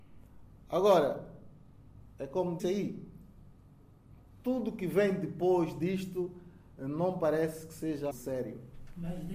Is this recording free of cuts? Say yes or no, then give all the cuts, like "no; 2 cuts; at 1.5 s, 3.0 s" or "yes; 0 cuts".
no; 2 cuts; at 2.6 s, 8.1 s